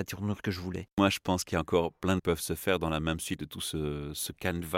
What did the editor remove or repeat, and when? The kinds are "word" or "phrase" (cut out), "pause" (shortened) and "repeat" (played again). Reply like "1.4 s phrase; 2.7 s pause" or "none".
2.2 s phrase; 3.4 s word